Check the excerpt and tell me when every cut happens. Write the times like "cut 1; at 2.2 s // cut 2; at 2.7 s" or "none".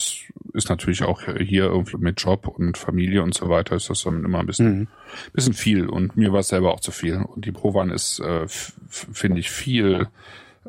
cut 1; at 1.9 s